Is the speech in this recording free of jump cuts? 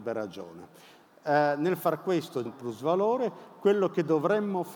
no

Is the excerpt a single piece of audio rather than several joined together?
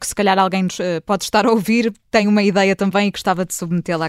yes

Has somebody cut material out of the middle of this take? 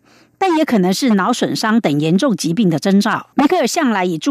yes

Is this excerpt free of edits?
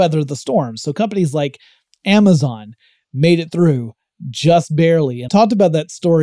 no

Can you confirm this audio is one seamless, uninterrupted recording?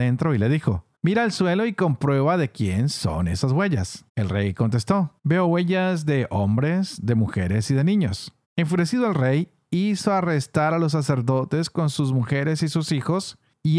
no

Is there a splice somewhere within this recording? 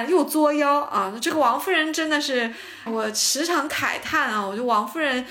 yes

